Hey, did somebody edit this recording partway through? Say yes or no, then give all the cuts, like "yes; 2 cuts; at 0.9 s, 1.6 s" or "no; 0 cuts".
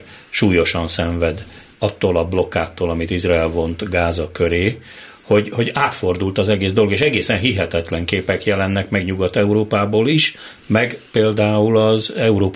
no; 0 cuts